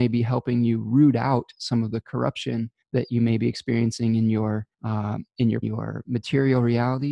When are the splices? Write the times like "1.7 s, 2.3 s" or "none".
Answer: 2.8 s, 4.7 s, 5.6 s